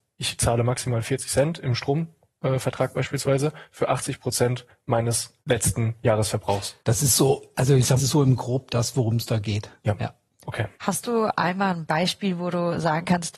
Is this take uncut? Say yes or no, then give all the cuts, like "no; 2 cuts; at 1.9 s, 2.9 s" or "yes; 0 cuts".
no; 4 cuts; at 5.4 s, 6.8 s, 8.0 s, 10.7 s